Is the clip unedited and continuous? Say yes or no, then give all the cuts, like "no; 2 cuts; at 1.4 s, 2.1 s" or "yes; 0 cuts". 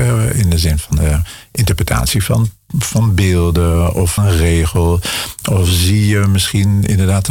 no; 1 cut; at 4.2 s